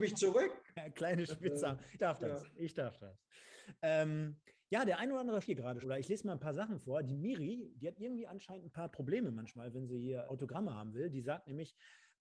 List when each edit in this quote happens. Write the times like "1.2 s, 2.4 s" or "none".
2.0 s, 5.4 s, 5.8 s, 10.3 s